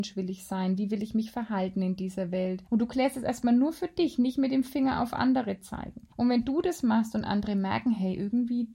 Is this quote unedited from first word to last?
no; 2 cuts; at 2.7 s, 6.1 s

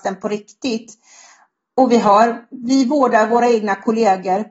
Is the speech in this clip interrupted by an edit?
no; 0 cuts

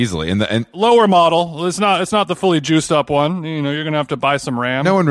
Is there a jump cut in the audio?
no; 0 cuts

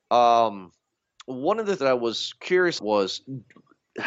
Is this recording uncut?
no; 2 cuts; at 1.8 s, 2.8 s

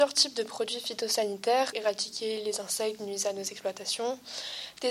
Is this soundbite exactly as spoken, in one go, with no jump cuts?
no; 2 cuts; at 1.7 s, 3.0 s

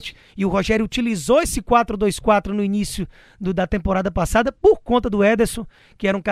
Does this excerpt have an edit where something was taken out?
no; 0 cuts

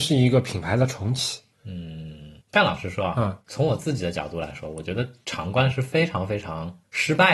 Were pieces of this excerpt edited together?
yes; 1 cut; at 2.4 s

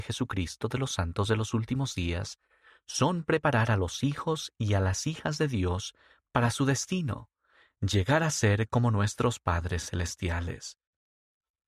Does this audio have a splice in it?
no; 0 cuts

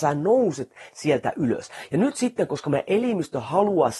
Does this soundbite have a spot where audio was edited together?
no; 0 cuts

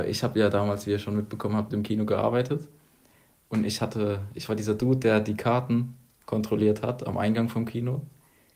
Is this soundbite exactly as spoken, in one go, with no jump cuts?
yes; 0 cuts

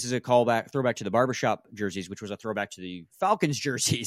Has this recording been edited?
no; 0 cuts

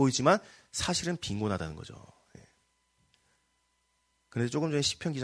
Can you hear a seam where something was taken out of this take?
no; 0 cuts

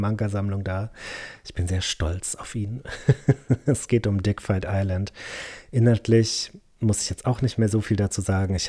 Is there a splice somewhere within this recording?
no; 0 cuts

